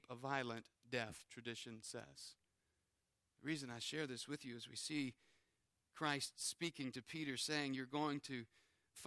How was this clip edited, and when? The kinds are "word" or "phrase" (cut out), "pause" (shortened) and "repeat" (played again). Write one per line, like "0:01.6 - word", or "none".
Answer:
none